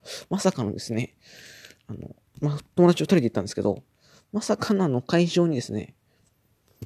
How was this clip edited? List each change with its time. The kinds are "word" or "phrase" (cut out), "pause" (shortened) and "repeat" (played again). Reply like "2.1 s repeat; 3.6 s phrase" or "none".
none

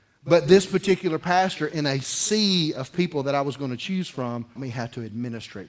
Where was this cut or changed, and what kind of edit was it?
4.6 s word

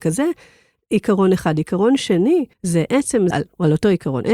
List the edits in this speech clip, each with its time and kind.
2.5 s pause; 3.3 s word

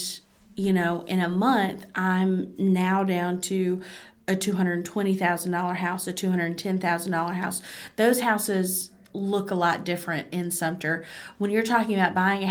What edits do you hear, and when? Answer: none

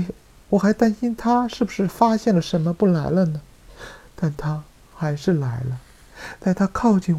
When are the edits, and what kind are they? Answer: none

